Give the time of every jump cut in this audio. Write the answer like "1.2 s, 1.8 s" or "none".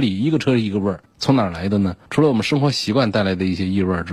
1.1 s, 2.1 s